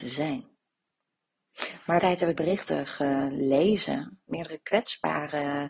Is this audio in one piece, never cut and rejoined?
no; 2 cuts; at 2.0 s, 2.4 s

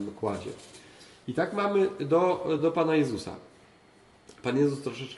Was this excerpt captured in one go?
yes; 0 cuts

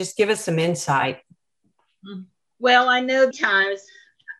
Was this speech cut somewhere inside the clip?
yes; 2 cuts; at 2.4 s, 3.3 s

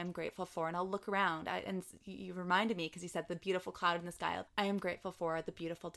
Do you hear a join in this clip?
yes; 1 cut; at 4.5 s

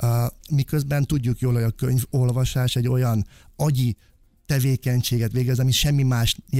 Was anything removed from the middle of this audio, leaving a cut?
no; 0 cuts

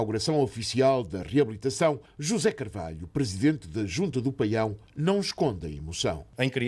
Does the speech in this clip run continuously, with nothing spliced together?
yes; 0 cuts

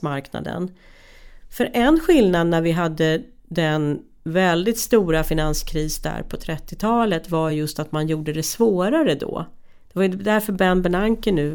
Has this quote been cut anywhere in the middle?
no; 0 cuts

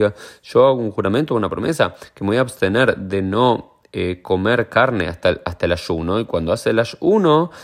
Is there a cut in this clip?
no; 0 cuts

